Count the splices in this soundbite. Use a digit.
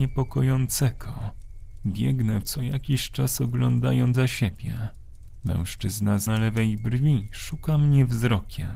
3